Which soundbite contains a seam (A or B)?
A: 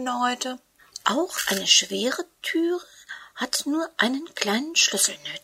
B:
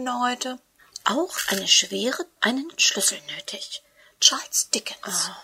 B